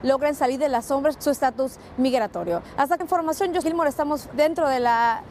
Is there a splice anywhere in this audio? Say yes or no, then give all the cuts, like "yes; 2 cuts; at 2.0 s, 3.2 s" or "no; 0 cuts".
yes; 4 cuts; at 1.1 s, 3.0 s, 3.6 s, 4.3 s